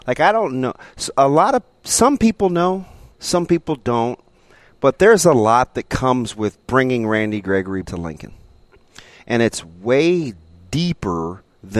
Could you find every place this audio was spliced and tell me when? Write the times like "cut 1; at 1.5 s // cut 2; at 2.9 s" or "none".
cut 1; at 6.6 s // cut 2; at 7.9 s